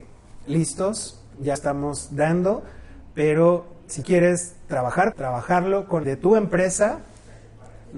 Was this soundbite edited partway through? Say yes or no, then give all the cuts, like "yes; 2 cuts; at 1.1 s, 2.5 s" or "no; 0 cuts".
yes; 4 cuts; at 1.6 s, 4.0 s, 5.1 s, 6.0 s